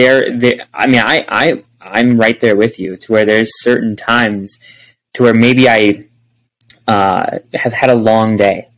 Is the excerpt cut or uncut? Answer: uncut